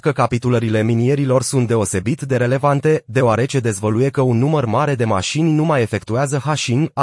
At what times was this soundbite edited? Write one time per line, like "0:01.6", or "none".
none